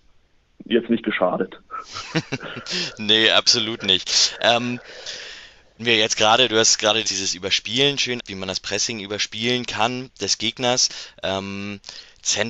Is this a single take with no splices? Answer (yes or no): no